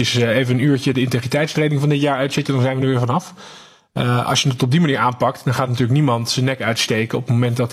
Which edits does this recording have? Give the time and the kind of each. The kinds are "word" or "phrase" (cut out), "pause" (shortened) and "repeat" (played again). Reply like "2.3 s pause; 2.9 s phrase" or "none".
none